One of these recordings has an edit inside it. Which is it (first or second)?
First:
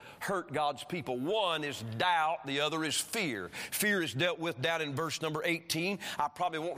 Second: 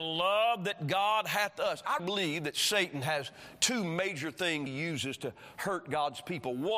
second